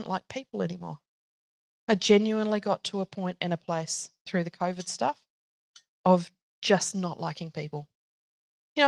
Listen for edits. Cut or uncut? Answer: uncut